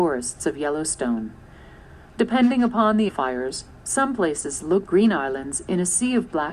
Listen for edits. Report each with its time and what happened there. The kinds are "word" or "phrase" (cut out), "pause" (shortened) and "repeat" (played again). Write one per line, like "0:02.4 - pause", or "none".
0:03.1 - phrase
0:04.9 - word